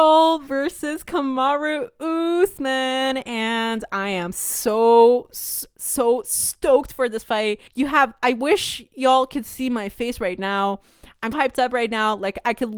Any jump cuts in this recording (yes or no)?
yes